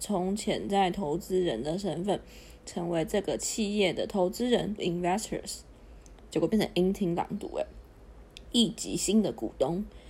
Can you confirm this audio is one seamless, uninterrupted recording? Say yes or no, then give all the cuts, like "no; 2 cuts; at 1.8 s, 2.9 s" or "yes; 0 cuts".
no; 1 cut; at 4.8 s